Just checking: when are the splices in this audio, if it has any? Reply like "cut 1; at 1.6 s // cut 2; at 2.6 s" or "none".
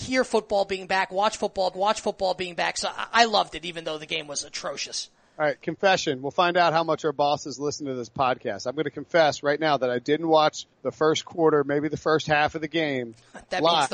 cut 1; at 1.7 s // cut 2; at 10.7 s